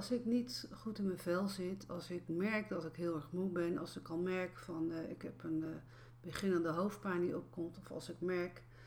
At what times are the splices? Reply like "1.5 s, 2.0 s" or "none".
none